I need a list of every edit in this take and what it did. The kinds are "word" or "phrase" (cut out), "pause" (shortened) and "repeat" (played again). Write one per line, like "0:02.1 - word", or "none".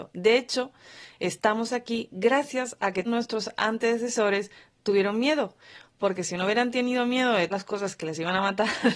0:03.1 - word
0:07.5 - word

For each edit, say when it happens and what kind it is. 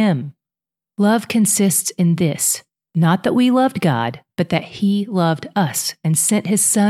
none

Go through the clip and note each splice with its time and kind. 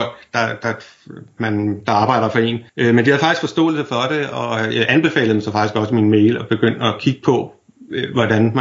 0:02.7 - pause

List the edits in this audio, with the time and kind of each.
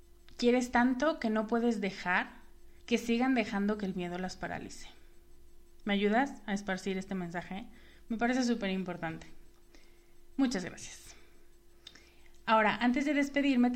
0:02.8 - pause

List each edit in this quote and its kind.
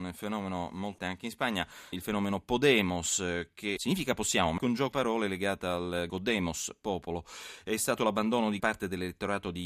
0:01.0 - word
0:01.9 - word
0:03.8 - word
0:04.6 - word
0:04.9 - word
0:06.1 - word
0:08.0 - word
0:08.6 - word

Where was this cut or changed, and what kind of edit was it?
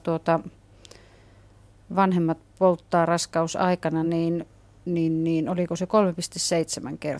none

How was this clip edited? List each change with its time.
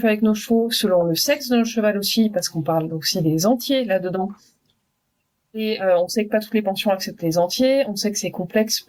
none

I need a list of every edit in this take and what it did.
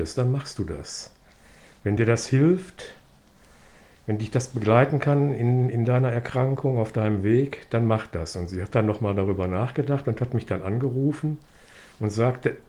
none

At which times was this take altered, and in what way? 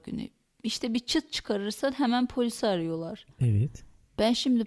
0:03.3 - pause

